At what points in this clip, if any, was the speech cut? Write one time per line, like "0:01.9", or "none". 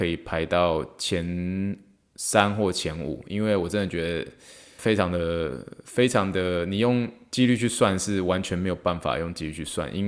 0:04.8